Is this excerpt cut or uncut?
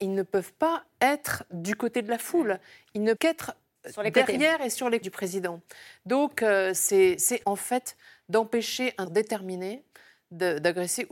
cut